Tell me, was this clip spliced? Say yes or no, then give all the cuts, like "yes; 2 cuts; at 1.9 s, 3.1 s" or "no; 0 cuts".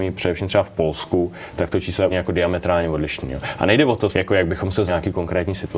yes; 3 cuts; at 2.1 s, 4.1 s, 4.9 s